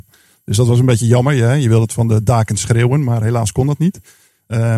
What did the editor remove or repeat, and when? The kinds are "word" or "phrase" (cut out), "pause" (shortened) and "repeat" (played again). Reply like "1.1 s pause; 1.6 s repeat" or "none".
none